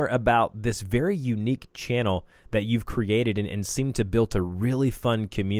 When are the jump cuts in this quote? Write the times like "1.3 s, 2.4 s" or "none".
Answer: none